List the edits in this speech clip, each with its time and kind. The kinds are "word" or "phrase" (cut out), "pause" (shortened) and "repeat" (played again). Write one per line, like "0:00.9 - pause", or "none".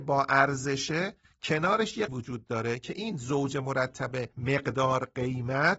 0:02.1 - word
0:04.3 - pause